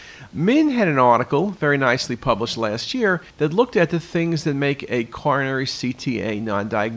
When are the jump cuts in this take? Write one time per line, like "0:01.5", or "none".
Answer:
0:03.3